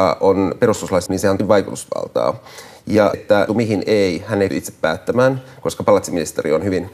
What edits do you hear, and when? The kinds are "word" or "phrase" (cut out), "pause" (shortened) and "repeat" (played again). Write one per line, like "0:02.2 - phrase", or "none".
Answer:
0:01.1 - word
0:01.4 - word
0:03.1 - word
0:03.5 - phrase
0:04.5 - phrase